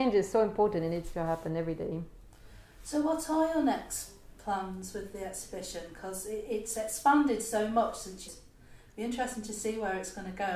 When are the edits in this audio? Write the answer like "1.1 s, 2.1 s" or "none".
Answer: 8.3 s